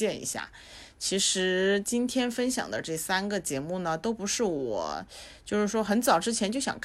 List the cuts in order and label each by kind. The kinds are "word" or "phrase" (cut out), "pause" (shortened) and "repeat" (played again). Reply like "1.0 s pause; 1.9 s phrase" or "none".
none